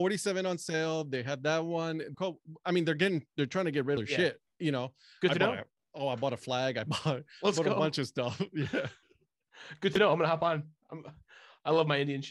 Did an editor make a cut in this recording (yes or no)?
yes